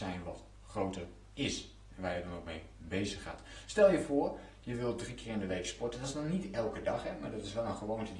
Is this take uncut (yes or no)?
yes